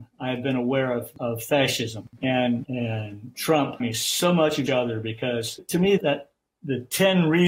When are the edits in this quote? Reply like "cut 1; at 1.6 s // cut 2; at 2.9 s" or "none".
cut 1; at 2.7 s // cut 2; at 3.8 s // cut 3; at 4.7 s // cut 4; at 5.6 s // cut 5; at 6.0 s